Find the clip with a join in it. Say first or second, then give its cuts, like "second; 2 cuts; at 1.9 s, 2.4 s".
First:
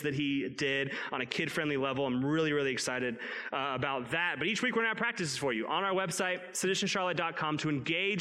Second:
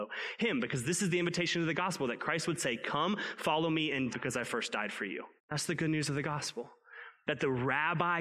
second; 2 cuts; at 4.1 s, 5.4 s